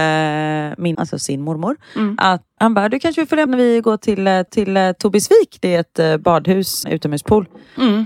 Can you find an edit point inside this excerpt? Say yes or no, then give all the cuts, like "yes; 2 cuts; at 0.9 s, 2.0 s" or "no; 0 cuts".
yes; 5 cuts; at 0.9 s, 2.6 s, 3.5 s, 4.5 s, 6.8 s